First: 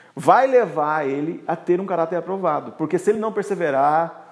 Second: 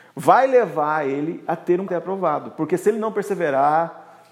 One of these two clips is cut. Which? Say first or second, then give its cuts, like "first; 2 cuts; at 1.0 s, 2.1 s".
second; 1 cut; at 1.9 s